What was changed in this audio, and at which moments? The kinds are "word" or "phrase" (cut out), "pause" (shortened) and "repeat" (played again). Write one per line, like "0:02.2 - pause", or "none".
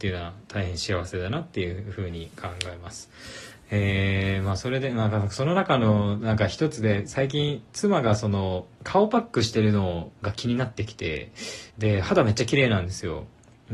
0:08.7 - pause
0:10.2 - pause
0:11.7 - pause

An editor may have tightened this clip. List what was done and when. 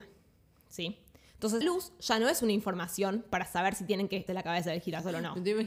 0:01.6 - word
0:04.3 - word

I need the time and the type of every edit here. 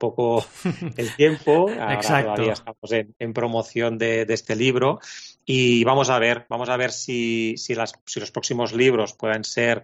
none

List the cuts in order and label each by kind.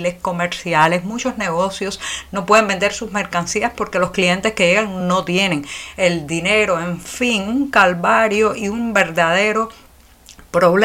none

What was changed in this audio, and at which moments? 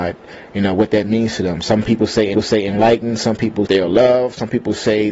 0:02.3 - repeat
0:03.7 - phrase

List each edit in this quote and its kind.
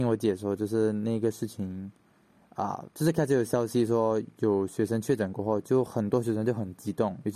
0:02.9 - pause

